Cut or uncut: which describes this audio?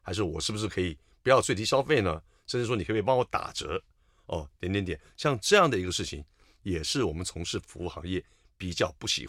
uncut